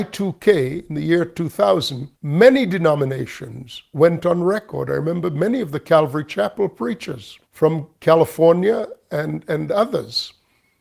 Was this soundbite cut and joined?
yes; 2 cuts; at 2.2 s, 7.5 s

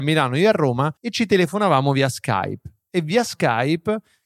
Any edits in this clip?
yes; 1 cut; at 1.0 s

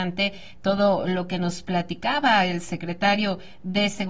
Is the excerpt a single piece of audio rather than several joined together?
yes; 0 cuts

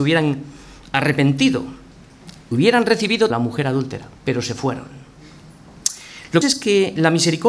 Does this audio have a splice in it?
yes; 3 cuts; at 3.3 s, 4.2 s, 6.4 s

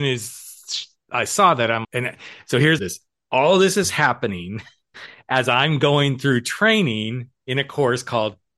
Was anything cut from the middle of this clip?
yes; 2 cuts; at 1.8 s, 2.8 s

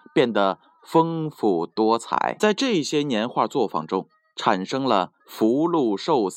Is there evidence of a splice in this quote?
yes; 1 cut; at 5.2 s

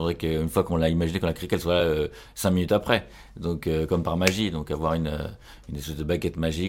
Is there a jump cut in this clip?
no; 0 cuts

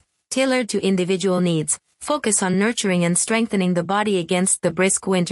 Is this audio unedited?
yes; 0 cuts

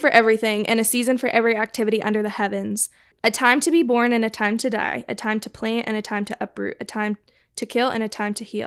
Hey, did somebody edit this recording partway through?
no; 0 cuts

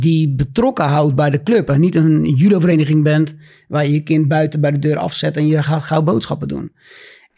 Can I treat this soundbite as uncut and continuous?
yes; 0 cuts

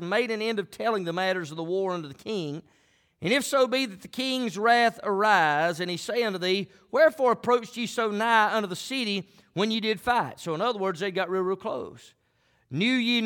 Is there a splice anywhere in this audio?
no; 0 cuts

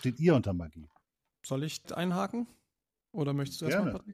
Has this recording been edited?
yes; 2 cuts; at 1.0 s, 1.8 s

